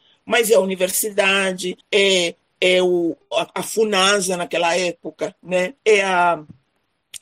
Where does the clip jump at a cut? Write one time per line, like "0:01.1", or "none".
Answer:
0:01.8
0:05.8